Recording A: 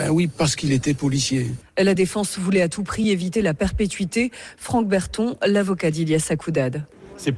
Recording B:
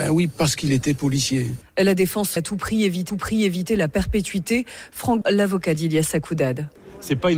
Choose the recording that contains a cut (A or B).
B